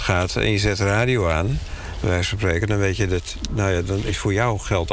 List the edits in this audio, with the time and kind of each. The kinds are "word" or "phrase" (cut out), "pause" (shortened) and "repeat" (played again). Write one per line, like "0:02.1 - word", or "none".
none